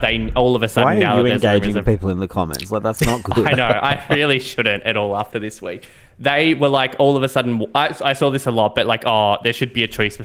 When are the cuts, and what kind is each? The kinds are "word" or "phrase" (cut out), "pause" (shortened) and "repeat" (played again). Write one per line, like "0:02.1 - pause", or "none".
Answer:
none